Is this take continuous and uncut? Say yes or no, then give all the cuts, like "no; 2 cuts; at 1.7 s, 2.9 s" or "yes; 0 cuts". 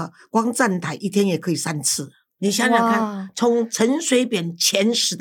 yes; 0 cuts